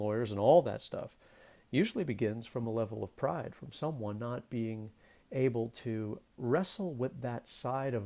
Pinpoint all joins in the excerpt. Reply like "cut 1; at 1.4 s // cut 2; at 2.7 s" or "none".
none